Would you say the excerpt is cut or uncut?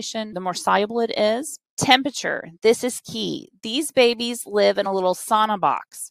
uncut